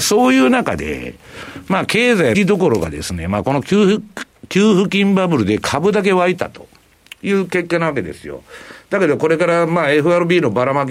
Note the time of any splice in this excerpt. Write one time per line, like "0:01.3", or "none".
0:02.3